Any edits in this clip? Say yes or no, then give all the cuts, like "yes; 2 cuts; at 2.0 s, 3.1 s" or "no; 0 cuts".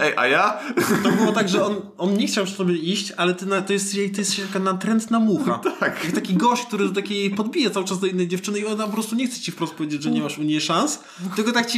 no; 0 cuts